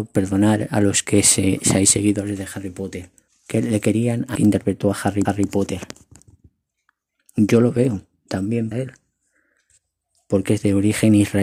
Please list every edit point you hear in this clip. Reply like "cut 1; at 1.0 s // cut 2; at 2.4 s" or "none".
cut 1; at 3.3 s // cut 2; at 4.4 s // cut 3; at 5.3 s // cut 4; at 8.7 s